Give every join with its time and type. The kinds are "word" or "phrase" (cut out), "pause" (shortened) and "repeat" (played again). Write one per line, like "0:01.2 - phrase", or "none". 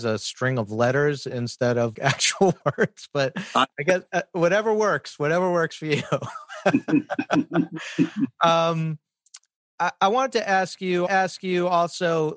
0:01.9 - word
0:11.1 - repeat